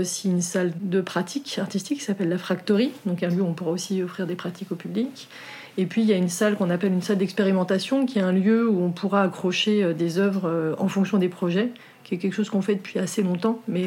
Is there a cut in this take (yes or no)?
no